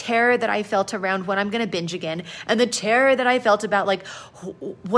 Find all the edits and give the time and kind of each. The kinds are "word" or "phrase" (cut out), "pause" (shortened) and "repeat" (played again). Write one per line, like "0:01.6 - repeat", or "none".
none